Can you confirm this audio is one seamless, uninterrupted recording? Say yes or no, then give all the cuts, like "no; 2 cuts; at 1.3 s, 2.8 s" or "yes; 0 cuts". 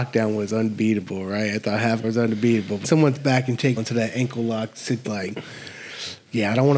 no; 5 cuts; at 2.0 s, 2.8 s, 3.2 s, 3.8 s, 5.0 s